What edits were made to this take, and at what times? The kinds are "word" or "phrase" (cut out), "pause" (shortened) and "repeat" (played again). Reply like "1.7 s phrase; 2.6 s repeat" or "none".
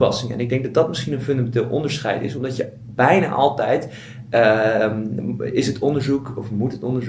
none